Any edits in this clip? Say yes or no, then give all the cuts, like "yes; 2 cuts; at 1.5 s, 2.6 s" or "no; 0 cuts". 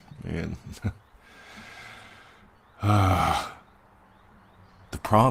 no; 0 cuts